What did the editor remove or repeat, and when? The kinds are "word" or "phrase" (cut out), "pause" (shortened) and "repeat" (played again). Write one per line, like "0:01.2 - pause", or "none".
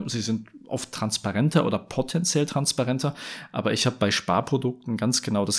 none

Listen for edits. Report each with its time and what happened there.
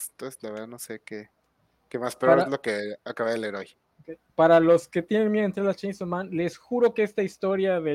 none

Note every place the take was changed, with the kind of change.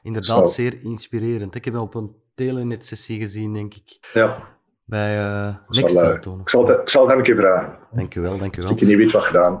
0:04.0 - pause

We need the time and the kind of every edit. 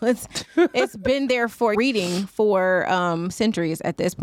0:01.7 - word

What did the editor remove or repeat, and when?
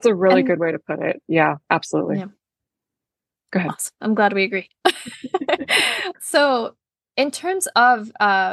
0:06.1 - word

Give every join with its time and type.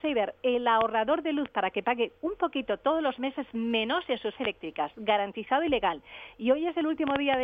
0:04.4 - word

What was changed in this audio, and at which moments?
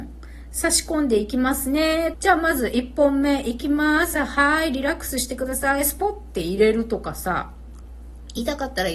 0:02.1 - phrase

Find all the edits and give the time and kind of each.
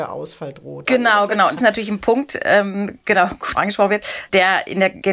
0:01.6 - phrase
0:03.5 - phrase

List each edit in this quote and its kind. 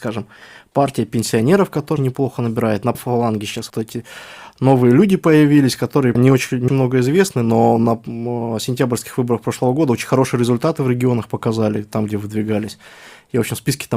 0:02.0 - word
0:02.9 - word
0:03.7 - word
0:06.1 - word
0:06.7 - word

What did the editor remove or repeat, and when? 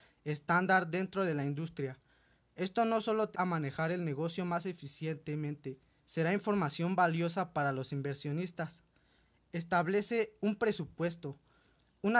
0:03.3 - word
0:06.0 - word

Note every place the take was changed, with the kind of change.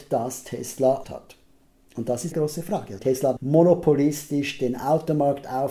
0:01.0 - word
0:02.3 - word
0:03.0 - word
0:03.4 - word

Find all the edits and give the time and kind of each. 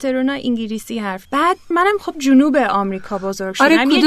0:01.2 - word
0:01.7 - word
0:02.1 - word

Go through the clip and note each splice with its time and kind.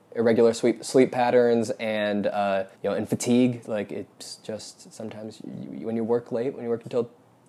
0:02.7 - pause

